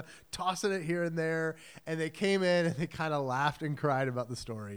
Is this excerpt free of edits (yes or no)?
yes